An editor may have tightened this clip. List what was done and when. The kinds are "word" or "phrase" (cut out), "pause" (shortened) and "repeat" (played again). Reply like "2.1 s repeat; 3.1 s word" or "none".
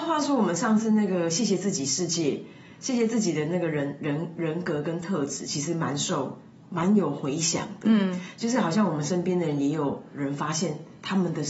none